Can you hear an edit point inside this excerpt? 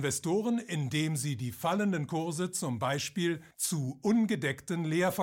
yes; 1 cut; at 3.5 s

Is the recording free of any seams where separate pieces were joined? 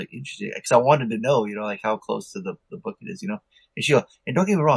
yes; 0 cuts

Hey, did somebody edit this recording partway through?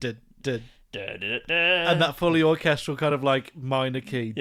no; 0 cuts

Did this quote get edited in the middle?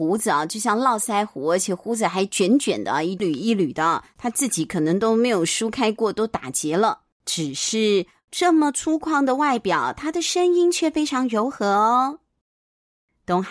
yes; 1 cut; at 7.1 s

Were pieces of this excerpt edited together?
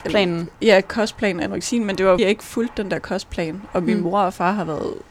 yes; 1 cut; at 2.2 s

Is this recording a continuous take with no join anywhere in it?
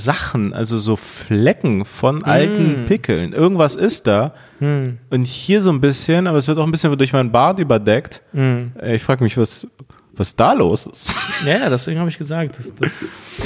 yes; 0 cuts

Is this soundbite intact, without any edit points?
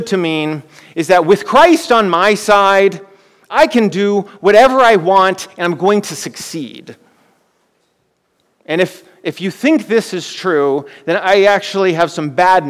yes; 0 cuts

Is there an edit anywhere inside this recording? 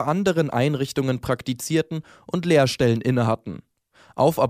no; 0 cuts

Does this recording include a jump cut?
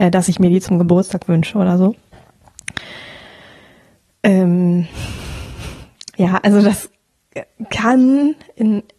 no; 0 cuts

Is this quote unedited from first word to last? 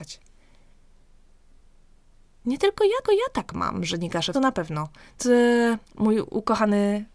no; 4 cuts; at 3.0 s, 4.3 s, 5.2 s, 5.9 s

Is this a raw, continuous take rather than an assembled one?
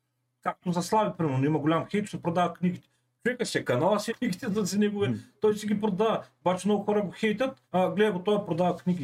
no; 3 cuts; at 2.0 s, 4.1 s, 7.7 s

